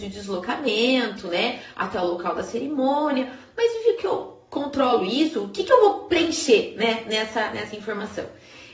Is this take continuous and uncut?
no; 1 cut; at 4.0 s

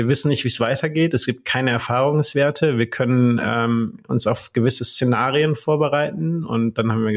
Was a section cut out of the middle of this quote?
no; 0 cuts

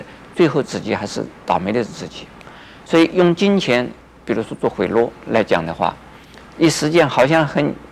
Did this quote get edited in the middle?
no; 0 cuts

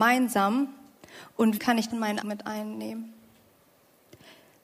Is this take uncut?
no; 3 cuts; at 1.6 s, 1.9 s, 2.2 s

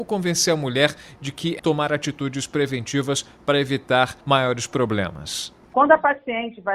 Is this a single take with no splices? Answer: no; 3 cuts; at 1.6 s, 4.2 s, 5.6 s

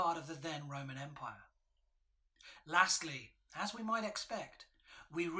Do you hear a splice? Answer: no; 0 cuts

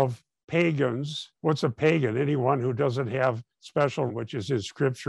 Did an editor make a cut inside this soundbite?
yes; 2 cuts; at 1.4 s, 4.1 s

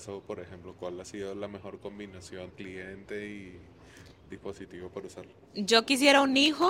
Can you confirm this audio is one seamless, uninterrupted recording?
no; 2 cuts; at 2.5 s, 5.4 s

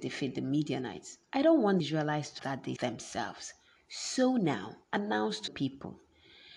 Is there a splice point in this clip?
yes; 6 cuts; at 1.2 s, 1.8 s, 2.4 s, 2.8 s, 4.8 s, 5.5 s

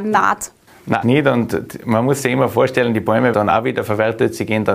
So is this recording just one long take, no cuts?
no; 2 cuts; at 1.0 s, 3.3 s

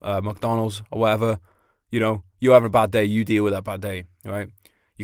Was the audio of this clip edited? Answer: no; 0 cuts

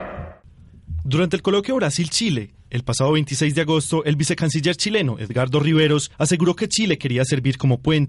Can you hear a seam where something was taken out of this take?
yes; 1 cut; at 6.1 s

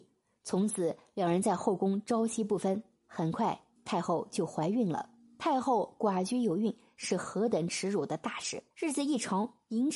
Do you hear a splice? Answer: yes; 3 cuts; at 3.8 s, 5.3 s, 8.7 s

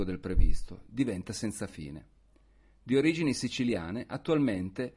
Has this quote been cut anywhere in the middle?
no; 0 cuts

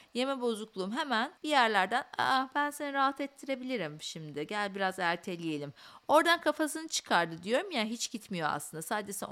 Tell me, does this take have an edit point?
yes; 1 cut; at 1.4 s

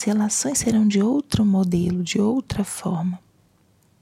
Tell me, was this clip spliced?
no; 0 cuts

